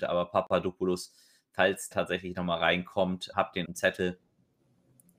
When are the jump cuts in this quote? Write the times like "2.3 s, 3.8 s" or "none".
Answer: 1.9 s, 3.3 s, 3.6 s